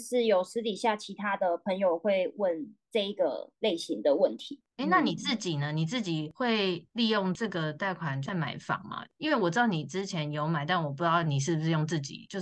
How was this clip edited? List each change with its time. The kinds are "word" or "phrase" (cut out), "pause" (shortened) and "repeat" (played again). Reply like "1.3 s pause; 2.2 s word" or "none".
none